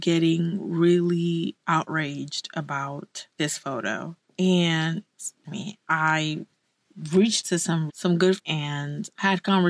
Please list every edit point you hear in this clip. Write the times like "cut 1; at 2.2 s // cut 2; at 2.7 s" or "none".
cut 1; at 1.6 s // cut 2; at 3.3 s // cut 3; at 5.4 s // cut 4; at 7.4 s // cut 5; at 7.9 s // cut 6; at 8.4 s